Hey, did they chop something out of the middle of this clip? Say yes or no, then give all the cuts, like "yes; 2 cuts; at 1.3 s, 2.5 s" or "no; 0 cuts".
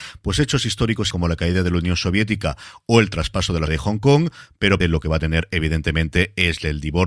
yes; 3 cuts; at 1.1 s, 3.7 s, 4.8 s